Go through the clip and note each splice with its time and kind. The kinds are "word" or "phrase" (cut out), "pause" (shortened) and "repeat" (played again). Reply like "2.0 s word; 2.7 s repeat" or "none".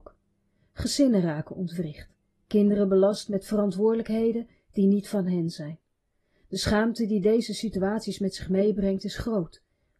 none